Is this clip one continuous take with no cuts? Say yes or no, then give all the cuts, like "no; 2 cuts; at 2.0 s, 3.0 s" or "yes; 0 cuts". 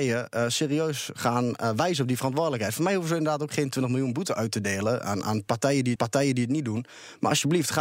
no; 1 cut; at 6.0 s